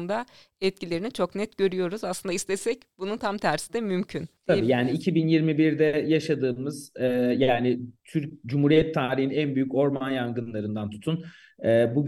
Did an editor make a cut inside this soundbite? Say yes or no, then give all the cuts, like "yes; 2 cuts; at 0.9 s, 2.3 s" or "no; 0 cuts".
no; 0 cuts